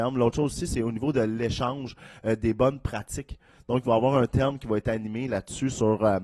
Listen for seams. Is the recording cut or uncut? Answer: uncut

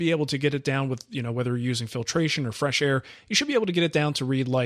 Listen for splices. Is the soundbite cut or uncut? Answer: uncut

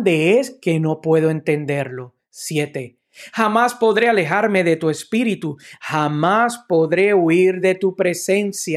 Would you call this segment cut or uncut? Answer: uncut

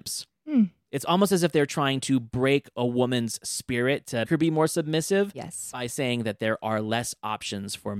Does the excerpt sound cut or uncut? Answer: cut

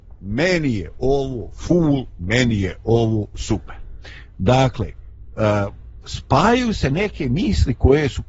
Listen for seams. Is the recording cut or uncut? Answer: uncut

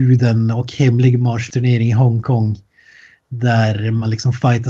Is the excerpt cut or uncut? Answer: cut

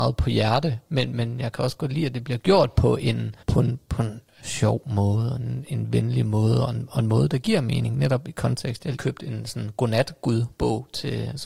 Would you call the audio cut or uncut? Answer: cut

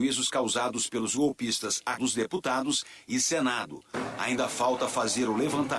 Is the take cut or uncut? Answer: cut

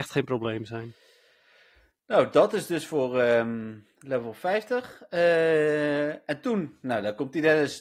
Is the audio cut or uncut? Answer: uncut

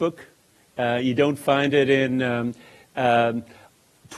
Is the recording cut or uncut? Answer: uncut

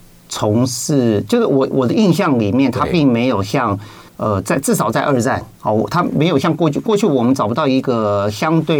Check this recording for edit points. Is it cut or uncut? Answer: cut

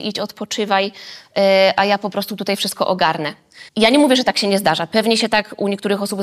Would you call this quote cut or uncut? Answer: cut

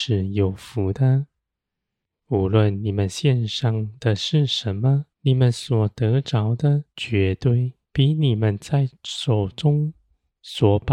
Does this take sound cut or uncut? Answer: cut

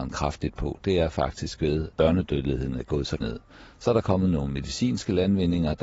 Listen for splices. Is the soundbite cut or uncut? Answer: cut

